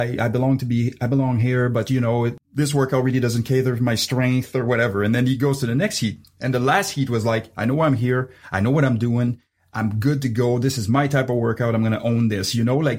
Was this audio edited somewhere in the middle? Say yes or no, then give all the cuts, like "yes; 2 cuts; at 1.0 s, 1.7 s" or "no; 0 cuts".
no; 0 cuts